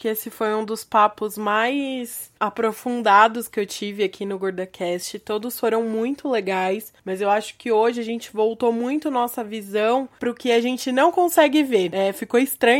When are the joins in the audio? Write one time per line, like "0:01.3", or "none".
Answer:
0:07.0